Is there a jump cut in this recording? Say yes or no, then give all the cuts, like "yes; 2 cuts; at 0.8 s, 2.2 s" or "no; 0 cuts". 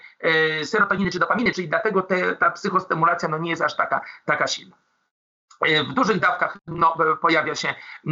no; 0 cuts